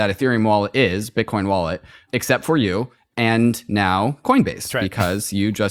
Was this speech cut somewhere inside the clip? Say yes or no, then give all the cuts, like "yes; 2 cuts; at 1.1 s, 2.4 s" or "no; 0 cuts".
no; 0 cuts